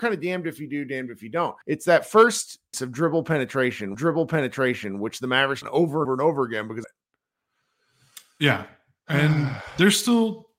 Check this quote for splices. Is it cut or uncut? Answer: cut